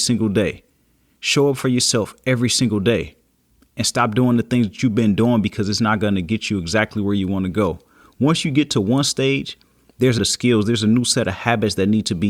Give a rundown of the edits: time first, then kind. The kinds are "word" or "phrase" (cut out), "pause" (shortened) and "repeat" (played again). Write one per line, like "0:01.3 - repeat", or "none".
0:10.2 - phrase